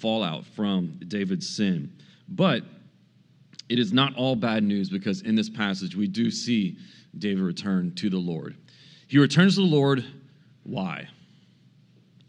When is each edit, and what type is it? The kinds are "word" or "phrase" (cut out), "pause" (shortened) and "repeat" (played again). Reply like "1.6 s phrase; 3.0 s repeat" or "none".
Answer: none